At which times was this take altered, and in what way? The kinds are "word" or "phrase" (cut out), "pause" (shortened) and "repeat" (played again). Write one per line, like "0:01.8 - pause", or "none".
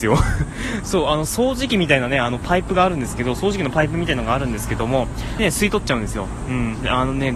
0:05.4 - phrase